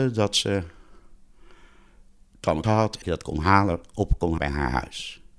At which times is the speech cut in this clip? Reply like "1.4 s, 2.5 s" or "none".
2.6 s, 3.0 s, 4.4 s